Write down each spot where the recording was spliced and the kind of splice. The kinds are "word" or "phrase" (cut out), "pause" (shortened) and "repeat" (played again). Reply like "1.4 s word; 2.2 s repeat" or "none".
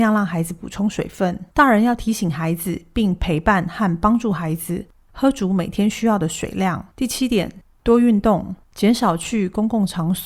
1.5 s pause; 6.9 s pause; 8.6 s pause